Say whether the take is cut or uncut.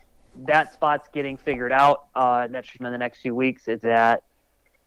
cut